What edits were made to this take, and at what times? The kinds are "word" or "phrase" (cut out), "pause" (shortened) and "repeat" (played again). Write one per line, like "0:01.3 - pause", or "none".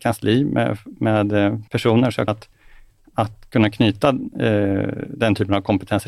0:01.7 - pause
0:02.3 - word

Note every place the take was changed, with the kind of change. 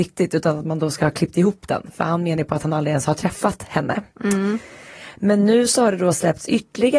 none

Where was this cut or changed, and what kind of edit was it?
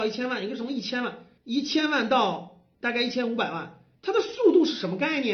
0:01.4 - pause
0:02.7 - pause
0:04.0 - pause

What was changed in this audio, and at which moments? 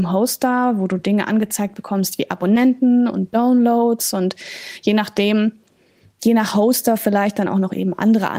none

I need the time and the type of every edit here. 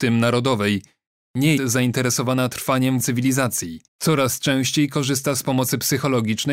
0:01.6 - word
0:03.0 - word
0:03.9 - pause

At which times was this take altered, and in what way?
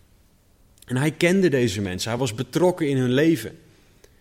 none

